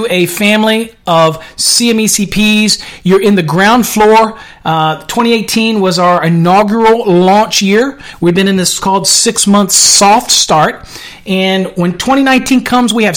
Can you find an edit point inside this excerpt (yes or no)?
yes